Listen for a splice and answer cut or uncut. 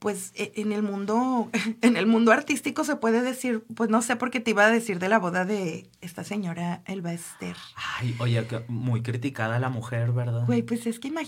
cut